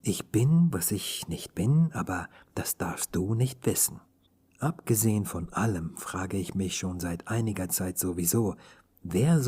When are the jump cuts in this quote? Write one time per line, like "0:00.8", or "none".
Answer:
none